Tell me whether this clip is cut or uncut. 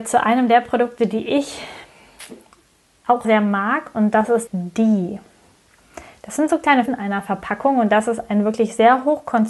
cut